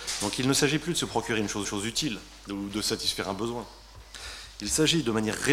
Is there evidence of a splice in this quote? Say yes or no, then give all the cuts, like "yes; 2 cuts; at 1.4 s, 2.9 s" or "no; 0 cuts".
yes; 1 cut; at 1.6 s